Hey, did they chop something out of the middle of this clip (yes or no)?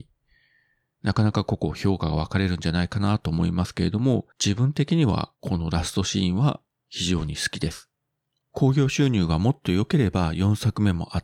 yes